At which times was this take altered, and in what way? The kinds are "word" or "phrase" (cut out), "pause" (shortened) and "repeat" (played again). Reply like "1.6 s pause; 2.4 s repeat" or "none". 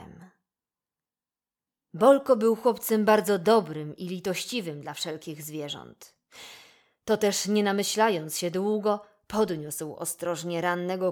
none